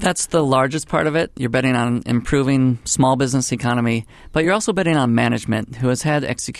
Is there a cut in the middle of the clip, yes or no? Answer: no